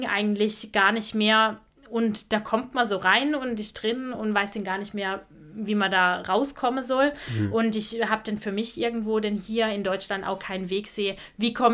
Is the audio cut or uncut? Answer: uncut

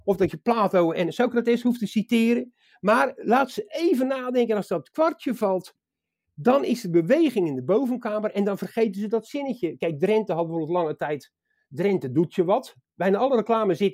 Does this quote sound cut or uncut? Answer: uncut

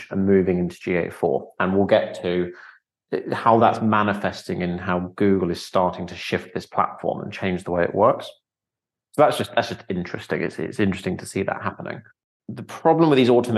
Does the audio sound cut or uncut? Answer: uncut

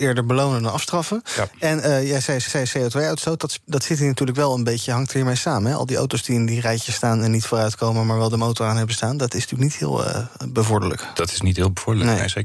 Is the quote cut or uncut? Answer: cut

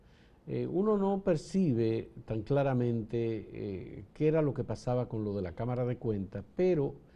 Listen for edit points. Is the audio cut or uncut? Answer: uncut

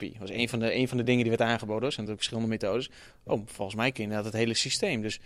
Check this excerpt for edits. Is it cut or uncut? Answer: uncut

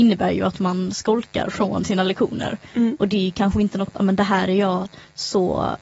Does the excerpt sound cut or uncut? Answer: cut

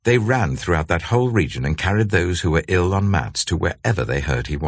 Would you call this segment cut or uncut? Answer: uncut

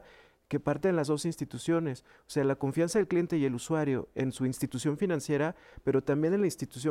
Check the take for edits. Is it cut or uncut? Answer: uncut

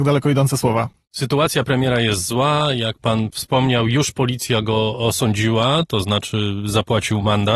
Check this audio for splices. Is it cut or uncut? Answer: uncut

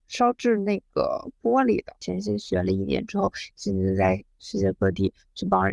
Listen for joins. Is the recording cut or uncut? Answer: uncut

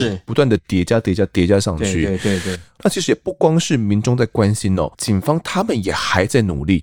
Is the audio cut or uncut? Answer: cut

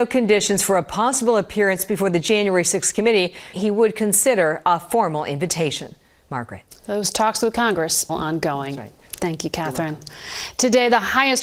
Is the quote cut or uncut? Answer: cut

